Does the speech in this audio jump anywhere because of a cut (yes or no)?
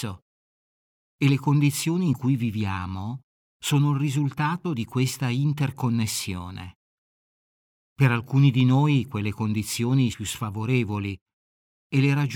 yes